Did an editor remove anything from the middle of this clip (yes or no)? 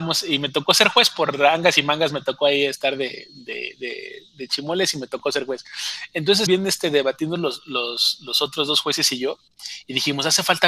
yes